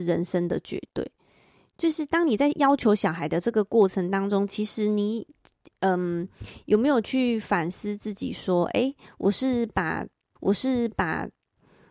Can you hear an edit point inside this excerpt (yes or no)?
yes